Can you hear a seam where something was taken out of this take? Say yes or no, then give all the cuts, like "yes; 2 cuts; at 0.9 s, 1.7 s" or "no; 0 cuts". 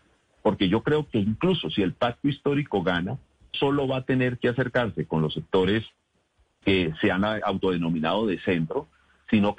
yes; 3 cuts; at 3.5 s, 6.6 s, 7.4 s